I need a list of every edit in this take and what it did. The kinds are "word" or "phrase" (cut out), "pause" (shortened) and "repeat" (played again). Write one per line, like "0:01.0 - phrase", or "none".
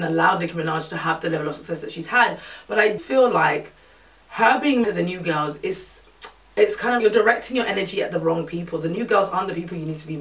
0:03.0 - word
0:04.8 - word
0:07.0 - word